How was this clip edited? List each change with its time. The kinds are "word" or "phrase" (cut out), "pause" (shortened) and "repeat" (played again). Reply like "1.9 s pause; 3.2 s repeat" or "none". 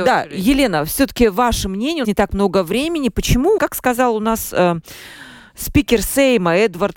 2.0 s word; 3.6 s word